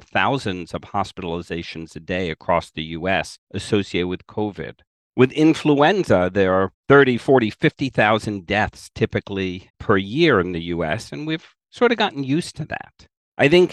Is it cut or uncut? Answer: uncut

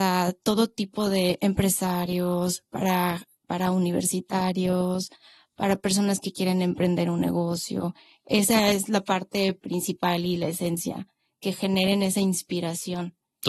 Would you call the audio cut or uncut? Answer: uncut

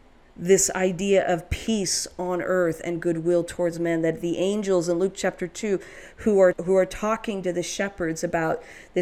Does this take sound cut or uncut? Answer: cut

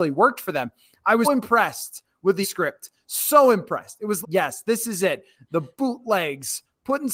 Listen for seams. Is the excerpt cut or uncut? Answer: cut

